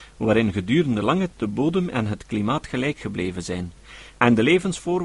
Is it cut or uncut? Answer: cut